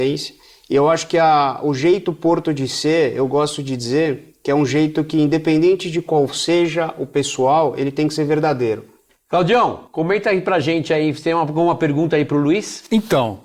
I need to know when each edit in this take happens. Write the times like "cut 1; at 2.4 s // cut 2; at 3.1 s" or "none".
none

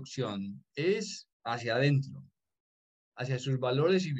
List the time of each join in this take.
cut 1; at 1.3 s

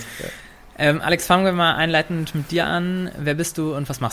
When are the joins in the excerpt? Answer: none

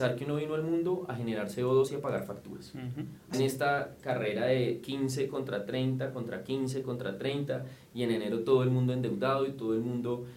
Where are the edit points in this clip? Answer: cut 1; at 3.3 s

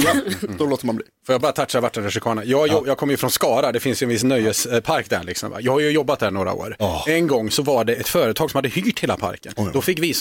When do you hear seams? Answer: none

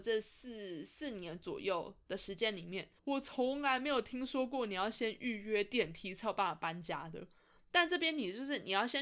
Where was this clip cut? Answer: cut 1; at 3.0 s

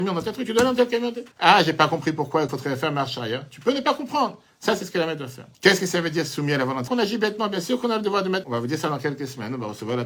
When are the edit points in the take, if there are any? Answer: cut 1; at 1.3 s // cut 2; at 2.5 s // cut 3; at 5.5 s // cut 4; at 6.9 s // cut 5; at 8.4 s

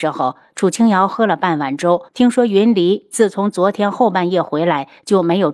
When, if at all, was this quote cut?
cut 1; at 2.1 s

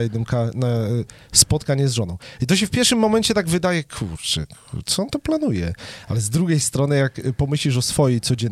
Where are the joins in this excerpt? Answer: none

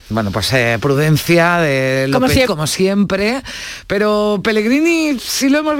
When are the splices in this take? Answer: cut 1; at 2.5 s

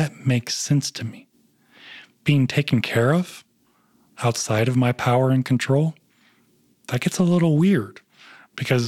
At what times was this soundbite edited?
none

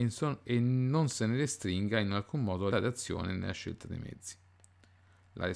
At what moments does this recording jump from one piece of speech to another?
cut 1; at 2.7 s

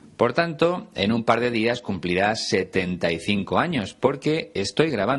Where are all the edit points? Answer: none

